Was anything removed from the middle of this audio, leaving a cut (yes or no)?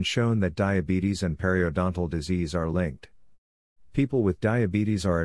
no